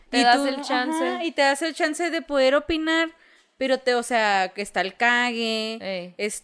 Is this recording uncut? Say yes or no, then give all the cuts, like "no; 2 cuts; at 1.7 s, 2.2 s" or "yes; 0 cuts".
yes; 0 cuts